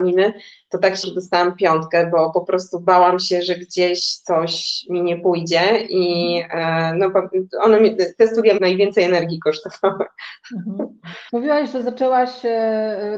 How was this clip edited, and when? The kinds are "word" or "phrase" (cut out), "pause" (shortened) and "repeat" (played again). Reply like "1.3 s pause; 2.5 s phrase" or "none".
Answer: 1.0 s word; 8.6 s word; 11.3 s pause